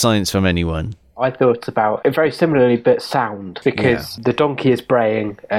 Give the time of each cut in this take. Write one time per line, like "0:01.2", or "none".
none